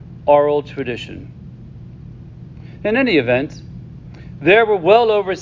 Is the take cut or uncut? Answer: uncut